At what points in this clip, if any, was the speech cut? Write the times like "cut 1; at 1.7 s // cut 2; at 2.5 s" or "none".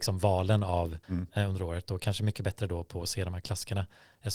cut 1; at 1.0 s